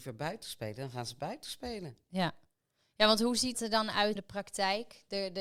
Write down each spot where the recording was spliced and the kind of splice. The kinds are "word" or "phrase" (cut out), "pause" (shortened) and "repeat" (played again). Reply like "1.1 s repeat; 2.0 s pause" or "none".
3.5 s word; 4.2 s word